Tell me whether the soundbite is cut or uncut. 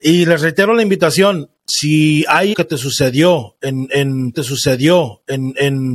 cut